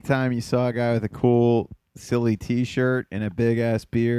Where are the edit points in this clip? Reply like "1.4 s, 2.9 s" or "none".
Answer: none